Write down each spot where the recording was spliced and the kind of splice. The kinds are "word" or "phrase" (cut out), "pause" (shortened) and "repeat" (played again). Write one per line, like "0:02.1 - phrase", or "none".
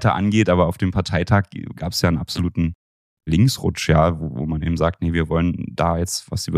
none